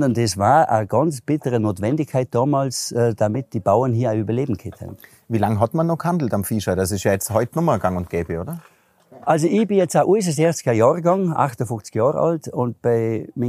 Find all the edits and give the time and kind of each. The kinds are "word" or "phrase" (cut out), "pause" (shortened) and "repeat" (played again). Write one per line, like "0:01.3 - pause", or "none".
none